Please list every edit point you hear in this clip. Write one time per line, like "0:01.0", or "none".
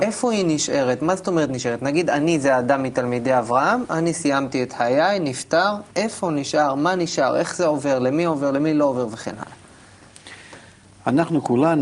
0:05.9